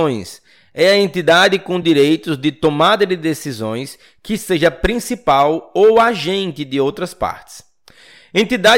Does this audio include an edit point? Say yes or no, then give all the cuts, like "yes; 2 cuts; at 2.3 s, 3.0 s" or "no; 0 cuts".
no; 0 cuts